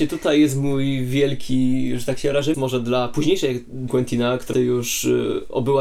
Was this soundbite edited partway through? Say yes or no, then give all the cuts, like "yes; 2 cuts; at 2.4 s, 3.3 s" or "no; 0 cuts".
yes; 3 cuts; at 2.5 s, 3.9 s, 4.5 s